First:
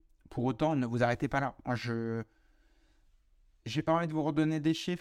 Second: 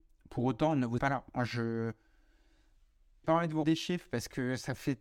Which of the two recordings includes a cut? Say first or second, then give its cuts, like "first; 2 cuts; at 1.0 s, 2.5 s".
second; 3 cuts; at 1.0 s, 3.2 s, 3.6 s